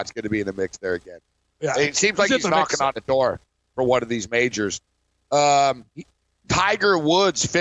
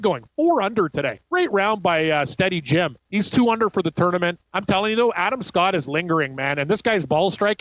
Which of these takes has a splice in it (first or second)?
second